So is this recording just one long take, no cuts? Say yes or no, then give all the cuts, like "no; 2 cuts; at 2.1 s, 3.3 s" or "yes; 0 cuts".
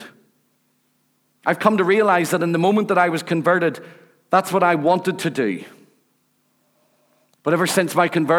yes; 0 cuts